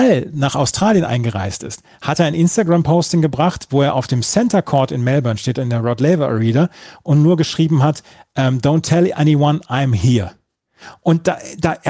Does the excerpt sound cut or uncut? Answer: uncut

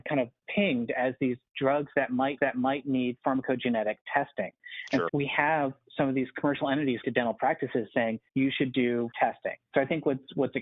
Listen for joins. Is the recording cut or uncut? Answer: cut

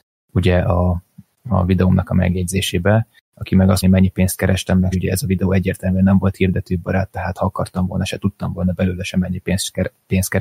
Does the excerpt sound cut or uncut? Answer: cut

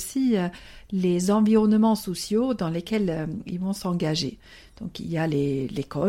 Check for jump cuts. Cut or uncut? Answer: uncut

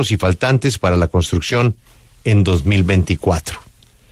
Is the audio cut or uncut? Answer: uncut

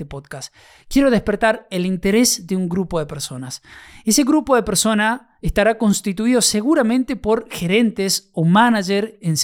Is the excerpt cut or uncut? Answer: uncut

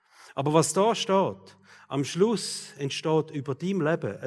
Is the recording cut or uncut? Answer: uncut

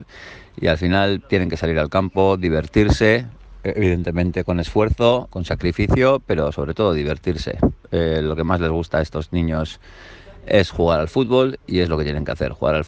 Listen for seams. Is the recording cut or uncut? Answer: uncut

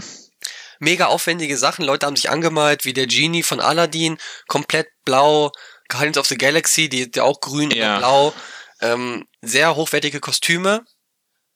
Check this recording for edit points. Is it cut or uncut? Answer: cut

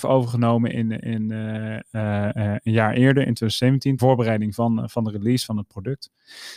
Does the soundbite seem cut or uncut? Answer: cut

